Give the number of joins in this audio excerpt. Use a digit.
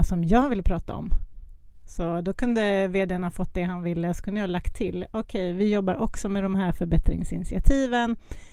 0